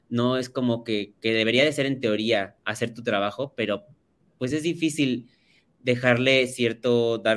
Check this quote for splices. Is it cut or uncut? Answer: uncut